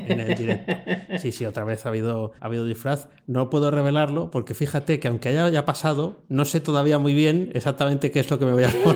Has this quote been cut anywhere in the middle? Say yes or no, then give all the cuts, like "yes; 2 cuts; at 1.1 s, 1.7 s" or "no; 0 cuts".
yes; 1 cut; at 2.4 s